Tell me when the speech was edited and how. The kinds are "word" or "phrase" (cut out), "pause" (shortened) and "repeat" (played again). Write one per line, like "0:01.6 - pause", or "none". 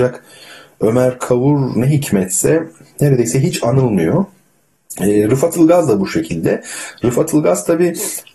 none